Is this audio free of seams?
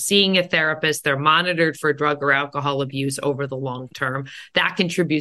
yes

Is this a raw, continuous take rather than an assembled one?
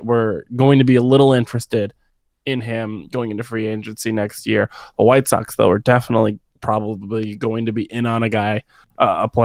yes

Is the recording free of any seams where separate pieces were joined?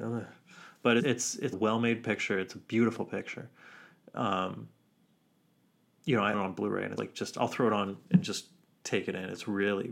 no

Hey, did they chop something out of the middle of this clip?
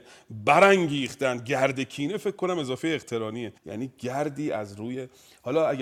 yes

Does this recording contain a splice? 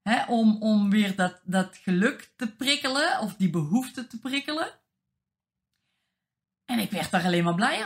no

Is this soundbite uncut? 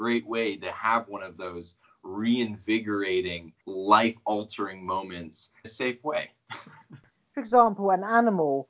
no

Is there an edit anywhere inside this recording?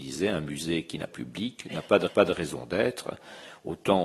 yes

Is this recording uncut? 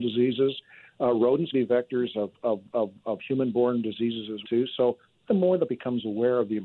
no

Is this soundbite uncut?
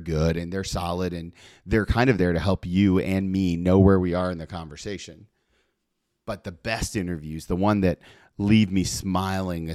yes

